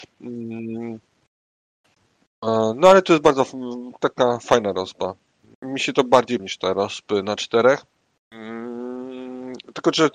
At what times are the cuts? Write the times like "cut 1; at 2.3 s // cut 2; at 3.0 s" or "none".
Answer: cut 1; at 6.4 s

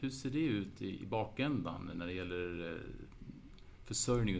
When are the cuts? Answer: none

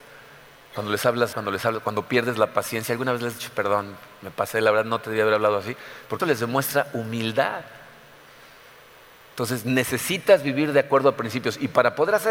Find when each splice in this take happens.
cut 1; at 1.3 s // cut 2; at 6.2 s

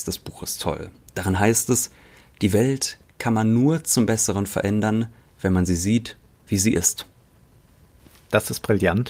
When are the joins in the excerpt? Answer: none

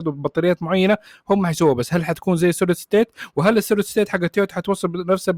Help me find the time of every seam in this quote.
none

